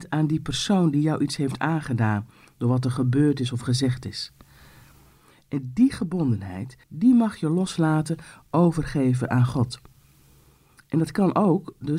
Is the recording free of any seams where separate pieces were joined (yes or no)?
no